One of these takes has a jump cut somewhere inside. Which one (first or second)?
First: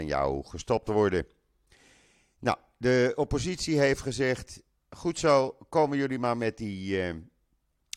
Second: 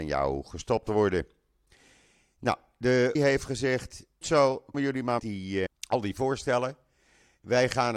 second